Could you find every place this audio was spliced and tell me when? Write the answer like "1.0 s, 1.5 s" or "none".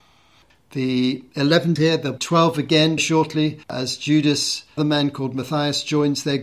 1.8 s, 2.2 s, 3.0 s, 3.6 s, 4.8 s